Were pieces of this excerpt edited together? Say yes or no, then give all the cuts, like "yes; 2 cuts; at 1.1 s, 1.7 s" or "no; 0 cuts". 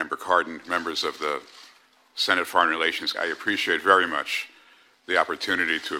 yes; 1 cut; at 3.1 s